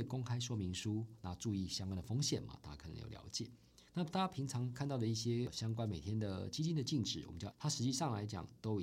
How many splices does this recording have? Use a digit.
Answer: 2